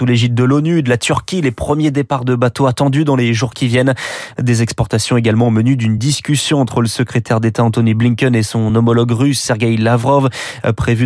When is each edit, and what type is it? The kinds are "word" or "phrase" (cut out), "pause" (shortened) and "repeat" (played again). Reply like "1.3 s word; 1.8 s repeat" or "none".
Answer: none